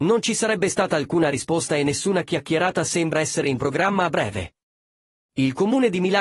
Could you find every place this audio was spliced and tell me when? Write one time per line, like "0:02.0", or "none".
none